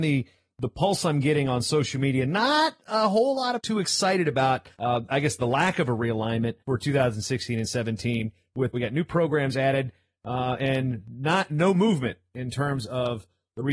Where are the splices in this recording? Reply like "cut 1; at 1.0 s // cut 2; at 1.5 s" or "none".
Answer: cut 1; at 3.6 s // cut 2; at 4.7 s // cut 3; at 6.6 s // cut 4; at 8.7 s